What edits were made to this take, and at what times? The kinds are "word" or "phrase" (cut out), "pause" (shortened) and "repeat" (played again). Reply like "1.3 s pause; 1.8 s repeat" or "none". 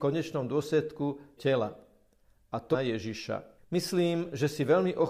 1.4 s word; 2.7 s phrase; 3.6 s pause